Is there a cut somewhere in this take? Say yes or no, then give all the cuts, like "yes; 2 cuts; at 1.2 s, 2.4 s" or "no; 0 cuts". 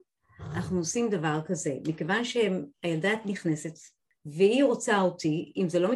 no; 0 cuts